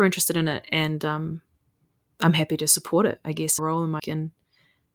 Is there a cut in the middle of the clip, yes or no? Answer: yes